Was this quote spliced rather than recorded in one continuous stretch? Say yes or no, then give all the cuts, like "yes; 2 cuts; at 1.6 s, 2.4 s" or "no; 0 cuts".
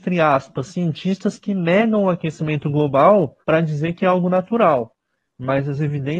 yes; 1 cut; at 3.4 s